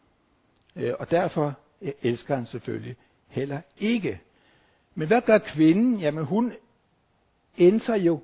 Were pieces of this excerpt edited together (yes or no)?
no